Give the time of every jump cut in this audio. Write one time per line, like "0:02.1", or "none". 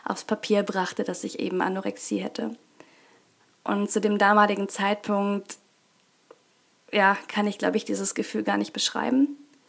none